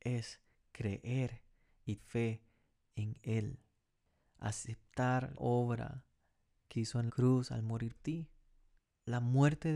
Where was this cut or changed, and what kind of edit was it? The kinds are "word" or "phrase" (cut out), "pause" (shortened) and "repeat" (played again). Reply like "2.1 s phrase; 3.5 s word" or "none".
2.0 s word; 5.4 s word; 6.7 s word; 7.1 s word; 8.0 s word